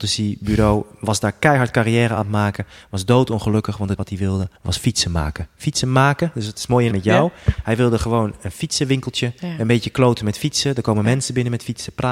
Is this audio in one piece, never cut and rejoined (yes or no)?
no